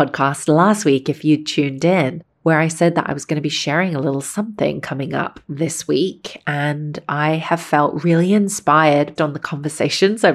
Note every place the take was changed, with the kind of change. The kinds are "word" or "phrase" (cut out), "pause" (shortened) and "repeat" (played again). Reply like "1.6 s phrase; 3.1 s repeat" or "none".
9.2 s word